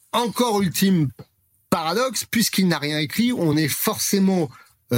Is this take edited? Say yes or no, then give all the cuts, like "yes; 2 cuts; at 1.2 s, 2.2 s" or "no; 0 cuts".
no; 0 cuts